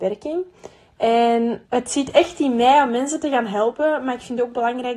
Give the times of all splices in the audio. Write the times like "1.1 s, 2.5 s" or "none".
1.7 s